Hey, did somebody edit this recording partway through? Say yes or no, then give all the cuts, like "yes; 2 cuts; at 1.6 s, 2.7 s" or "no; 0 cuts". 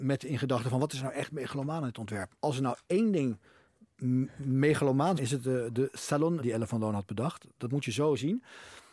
yes; 3 cuts; at 2.4 s, 5.2 s, 6.4 s